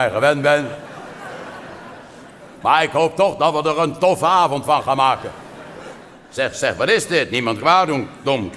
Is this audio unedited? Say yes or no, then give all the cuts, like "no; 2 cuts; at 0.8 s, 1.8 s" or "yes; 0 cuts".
no; 2 cuts; at 6.5 s, 7.6 s